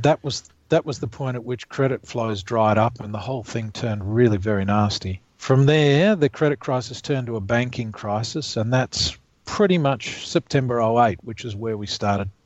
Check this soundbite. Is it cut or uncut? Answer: uncut